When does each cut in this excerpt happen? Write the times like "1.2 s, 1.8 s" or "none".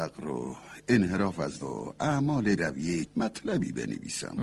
1.6 s, 2.6 s, 3.1 s